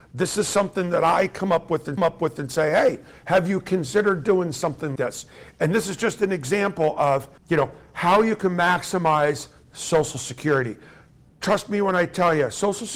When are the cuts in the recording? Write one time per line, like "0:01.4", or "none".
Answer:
0:02.0
0:05.0
0:07.4